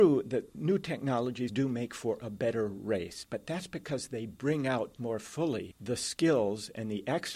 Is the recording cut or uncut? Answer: cut